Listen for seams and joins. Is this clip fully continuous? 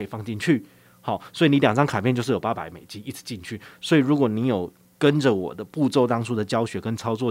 yes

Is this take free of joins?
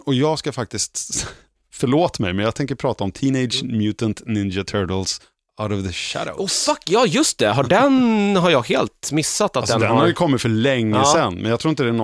yes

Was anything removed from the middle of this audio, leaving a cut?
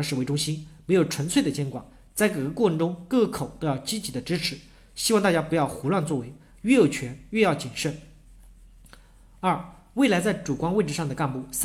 no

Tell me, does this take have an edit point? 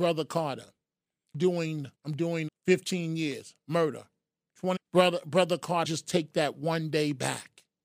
yes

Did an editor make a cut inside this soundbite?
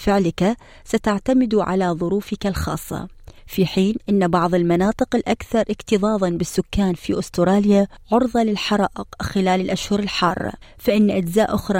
yes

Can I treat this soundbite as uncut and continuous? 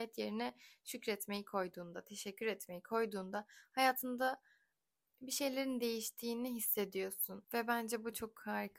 yes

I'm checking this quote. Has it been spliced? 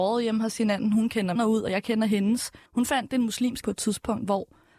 yes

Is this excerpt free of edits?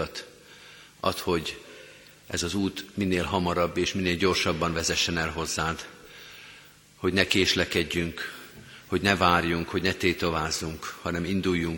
yes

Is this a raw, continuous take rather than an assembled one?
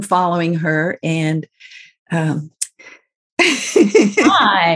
no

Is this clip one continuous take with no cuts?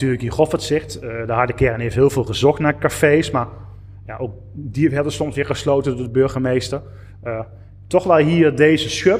yes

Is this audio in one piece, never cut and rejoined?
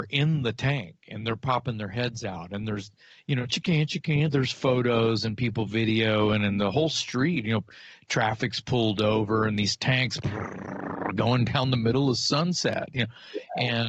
yes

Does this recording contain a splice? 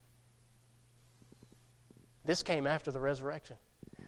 no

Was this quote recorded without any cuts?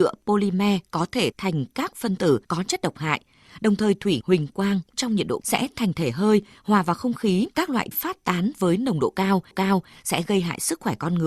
no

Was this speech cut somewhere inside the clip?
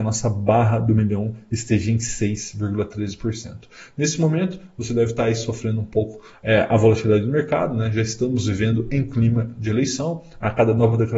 no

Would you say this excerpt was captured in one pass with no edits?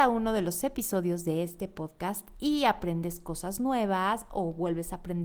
yes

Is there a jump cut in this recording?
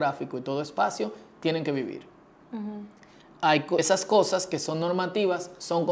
yes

